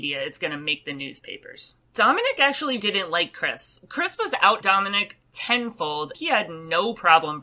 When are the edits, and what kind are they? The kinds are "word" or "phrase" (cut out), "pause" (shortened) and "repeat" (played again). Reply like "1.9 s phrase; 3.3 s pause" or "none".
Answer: 2.8 s word; 4.6 s word; 6.1 s word